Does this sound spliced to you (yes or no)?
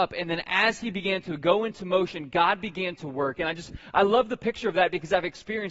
no